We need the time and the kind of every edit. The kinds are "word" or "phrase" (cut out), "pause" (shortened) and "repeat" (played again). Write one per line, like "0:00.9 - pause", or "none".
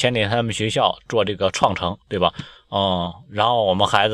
0:02.0 - pause